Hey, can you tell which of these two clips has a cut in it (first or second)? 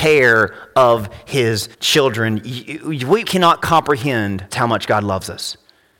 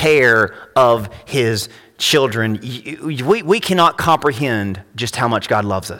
first